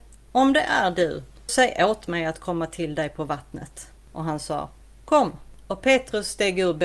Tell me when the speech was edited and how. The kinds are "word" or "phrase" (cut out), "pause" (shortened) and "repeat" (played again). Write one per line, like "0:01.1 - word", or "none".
0:01.5 - word